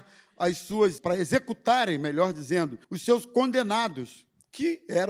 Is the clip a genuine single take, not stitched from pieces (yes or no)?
no